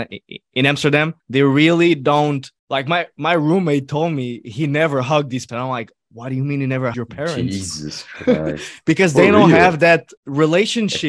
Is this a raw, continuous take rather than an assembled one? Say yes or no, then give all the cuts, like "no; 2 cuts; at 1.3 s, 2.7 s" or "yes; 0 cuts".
no; 5 cuts; at 1.2 s, 2.6 s, 5.5 s, 6.9 s, 10.2 s